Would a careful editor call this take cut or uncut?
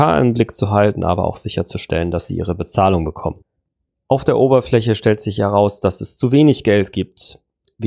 uncut